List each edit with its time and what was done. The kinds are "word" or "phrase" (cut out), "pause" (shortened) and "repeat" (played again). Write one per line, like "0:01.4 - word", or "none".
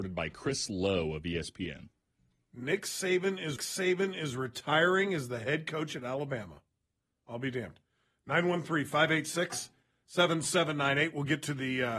0:03.6 - repeat